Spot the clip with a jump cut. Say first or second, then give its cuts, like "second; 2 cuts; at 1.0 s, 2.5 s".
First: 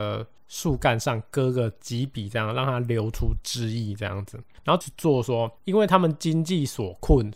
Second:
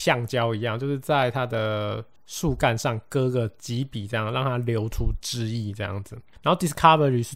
first; 2 cuts; at 4.8 s, 5.6 s